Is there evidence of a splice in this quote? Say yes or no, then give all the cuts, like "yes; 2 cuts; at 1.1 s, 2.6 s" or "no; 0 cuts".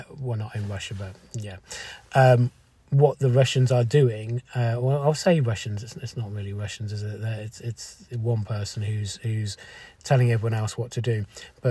no; 0 cuts